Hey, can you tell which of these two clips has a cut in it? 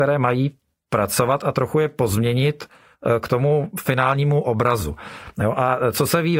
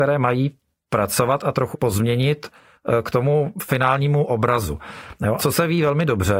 second; 2 cuts; at 1.7 s, 5.4 s

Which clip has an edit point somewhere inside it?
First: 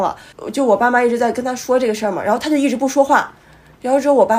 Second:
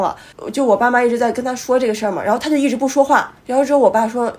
second; 1 cut; at 3.4 s

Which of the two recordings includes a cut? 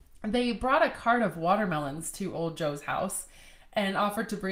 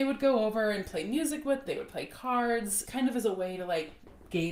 second; 2 cuts; at 1.7 s, 2.9 s

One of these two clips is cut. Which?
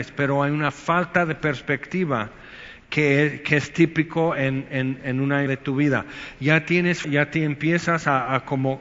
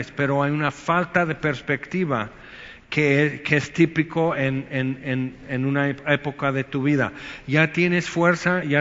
first; 3 cuts; at 5.0 s, 5.5 s, 7.0 s

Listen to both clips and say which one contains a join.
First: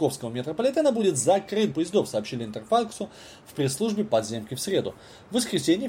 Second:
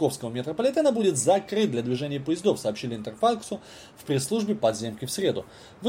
first; 1 cut; at 1.7 s

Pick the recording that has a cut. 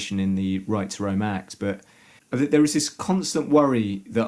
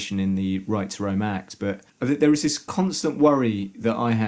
second; 1 cut; at 1.9 s

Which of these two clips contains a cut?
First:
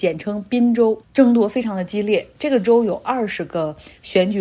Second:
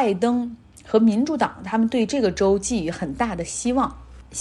first; 1 cut; at 1.0 s

